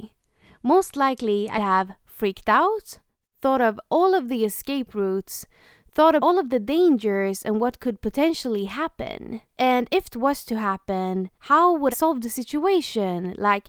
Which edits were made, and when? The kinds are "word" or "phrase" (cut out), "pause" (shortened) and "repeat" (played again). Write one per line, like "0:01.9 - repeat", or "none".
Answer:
0:01.6 - word
0:06.2 - word
0:09.5 - pause
0:10.1 - phrase
0:11.3 - pause
0:11.9 - word